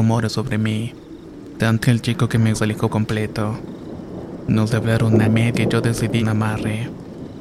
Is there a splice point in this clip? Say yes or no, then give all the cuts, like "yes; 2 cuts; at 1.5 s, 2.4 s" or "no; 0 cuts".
yes; 7 cuts; at 1.8 s, 2.5 s, 2.9 s, 4.7 s, 5.2 s, 5.5 s, 6.2 s